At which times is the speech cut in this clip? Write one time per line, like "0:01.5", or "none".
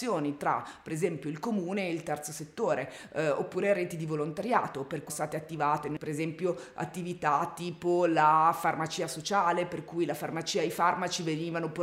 0:05.1